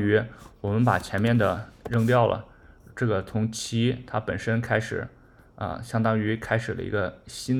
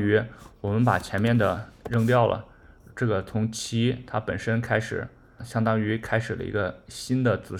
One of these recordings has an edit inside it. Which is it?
second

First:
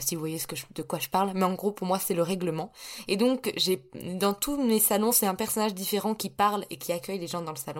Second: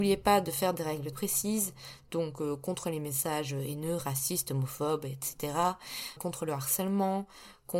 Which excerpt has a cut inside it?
second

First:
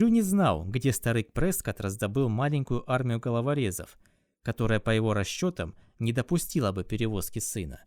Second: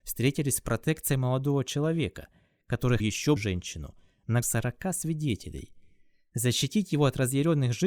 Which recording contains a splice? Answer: second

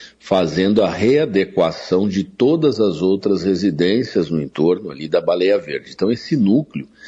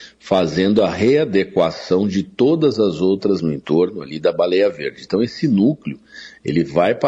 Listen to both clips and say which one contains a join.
second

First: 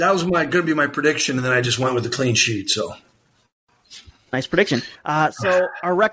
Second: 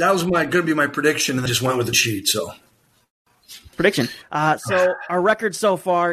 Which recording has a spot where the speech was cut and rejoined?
second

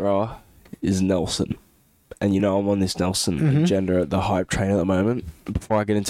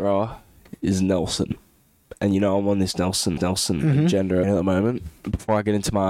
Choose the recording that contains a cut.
second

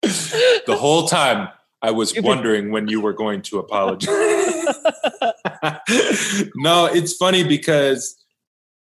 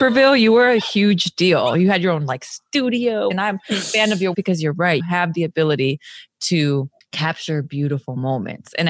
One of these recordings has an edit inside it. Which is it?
second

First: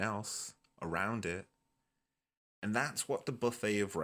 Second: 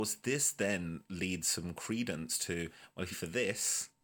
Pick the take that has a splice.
second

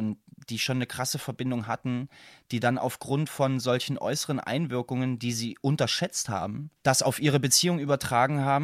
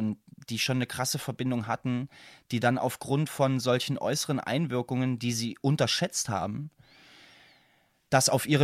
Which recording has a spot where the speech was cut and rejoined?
first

